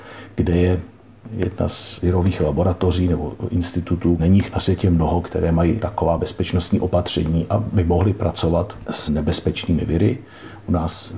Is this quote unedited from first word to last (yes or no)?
yes